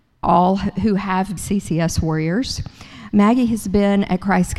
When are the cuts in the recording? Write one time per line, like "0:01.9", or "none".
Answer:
0:01.4

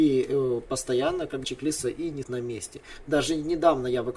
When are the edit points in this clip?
0:01.4
0:01.8
0:02.2

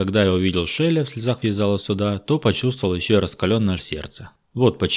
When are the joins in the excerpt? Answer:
0:01.4
0:03.8

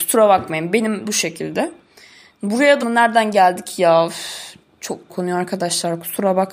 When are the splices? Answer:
0:01.0
0:02.8
0:05.1

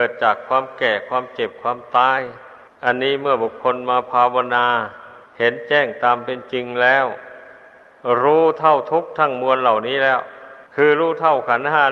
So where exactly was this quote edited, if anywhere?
0:02.7
0:05.3
0:10.7

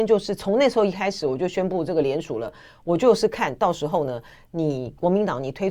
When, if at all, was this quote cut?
none

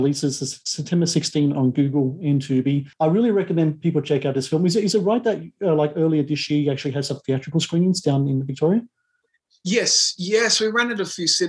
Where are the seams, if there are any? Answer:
0:02.9

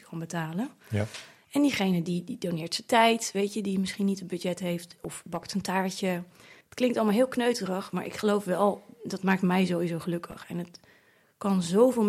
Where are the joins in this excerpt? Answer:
0:06.6

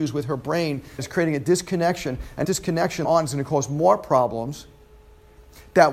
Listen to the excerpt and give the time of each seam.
0:01.0
0:02.4
0:03.0

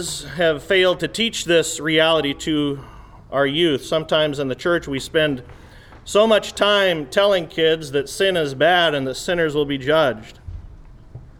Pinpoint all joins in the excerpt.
none

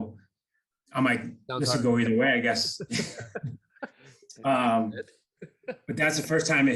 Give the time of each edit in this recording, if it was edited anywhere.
none

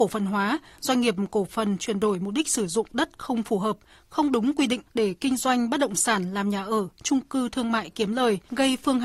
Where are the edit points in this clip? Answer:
0:04.9

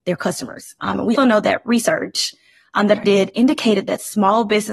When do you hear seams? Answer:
0:01.2
0:03.0

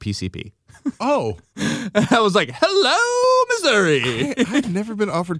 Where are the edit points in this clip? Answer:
none

